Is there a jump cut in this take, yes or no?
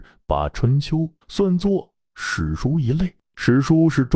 yes